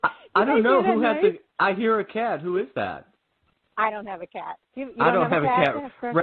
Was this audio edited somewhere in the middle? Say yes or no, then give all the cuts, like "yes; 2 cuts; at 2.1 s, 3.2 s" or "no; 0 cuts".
yes; 2 cuts; at 3.4 s, 4.6 s